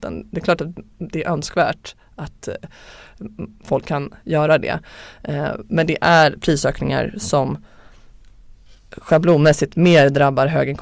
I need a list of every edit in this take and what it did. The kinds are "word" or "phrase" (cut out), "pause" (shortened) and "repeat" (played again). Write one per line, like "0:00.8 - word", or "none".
none

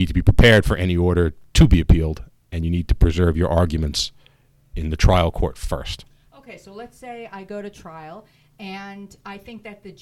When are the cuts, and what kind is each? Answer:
none

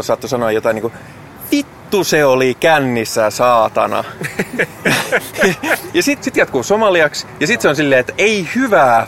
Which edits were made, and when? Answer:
0:06.2 - word

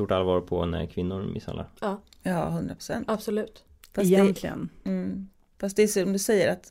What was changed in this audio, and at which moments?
none

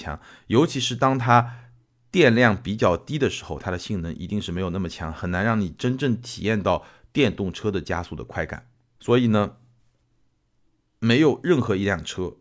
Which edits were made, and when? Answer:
none

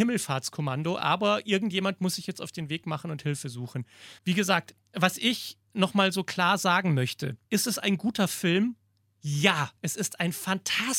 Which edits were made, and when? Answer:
0:04.2 - pause
0:05.6 - pause
0:07.4 - pause
0:09.8 - pause

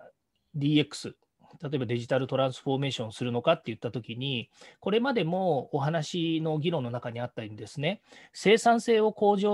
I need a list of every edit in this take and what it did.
none

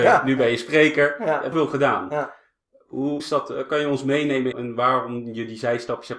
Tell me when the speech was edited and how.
0:01.5 - word
0:03.2 - word
0:04.5 - word

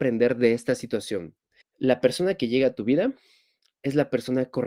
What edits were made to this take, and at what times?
0:01.6 - pause

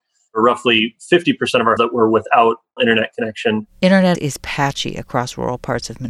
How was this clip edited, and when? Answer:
0:01.8 - word
0:02.8 - word
0:04.1 - word

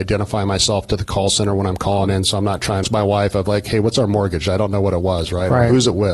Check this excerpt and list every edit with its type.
0:02.8 - phrase

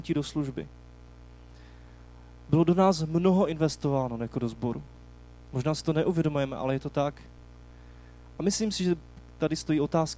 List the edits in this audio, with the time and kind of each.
none

